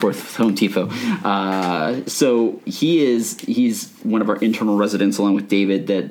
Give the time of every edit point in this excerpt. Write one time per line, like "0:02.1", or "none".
none